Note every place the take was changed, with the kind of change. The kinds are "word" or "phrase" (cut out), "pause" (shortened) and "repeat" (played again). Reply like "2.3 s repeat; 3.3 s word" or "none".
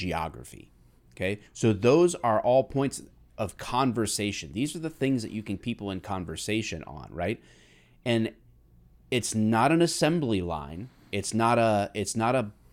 1.5 s pause; 5.6 s phrase